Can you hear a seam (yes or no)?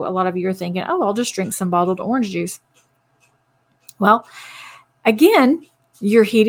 no